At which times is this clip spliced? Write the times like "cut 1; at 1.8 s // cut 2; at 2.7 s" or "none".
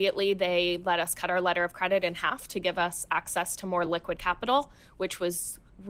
none